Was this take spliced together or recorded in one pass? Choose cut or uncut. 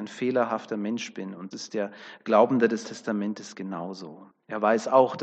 cut